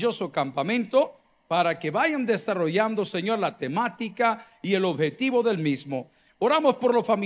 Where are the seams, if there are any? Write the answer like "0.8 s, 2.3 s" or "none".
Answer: none